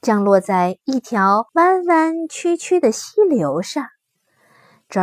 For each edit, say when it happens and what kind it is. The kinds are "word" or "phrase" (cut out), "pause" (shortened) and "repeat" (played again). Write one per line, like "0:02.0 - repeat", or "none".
0:01.5 - pause